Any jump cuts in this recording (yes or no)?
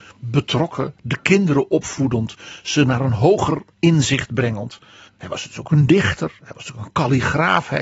yes